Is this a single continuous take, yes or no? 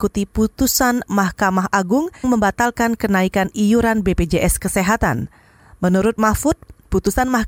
no